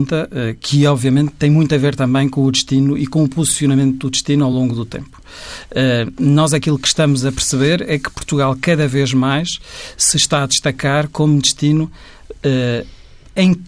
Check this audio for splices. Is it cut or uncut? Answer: uncut